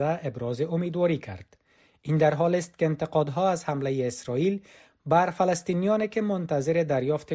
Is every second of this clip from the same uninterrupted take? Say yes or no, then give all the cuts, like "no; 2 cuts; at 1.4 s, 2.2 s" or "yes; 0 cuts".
yes; 0 cuts